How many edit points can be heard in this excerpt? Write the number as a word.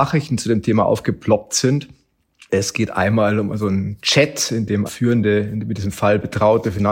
one